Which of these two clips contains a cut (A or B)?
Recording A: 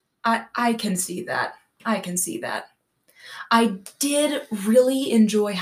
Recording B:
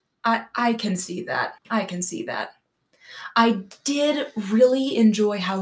B